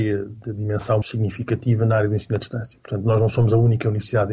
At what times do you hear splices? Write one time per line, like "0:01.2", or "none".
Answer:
0:01.0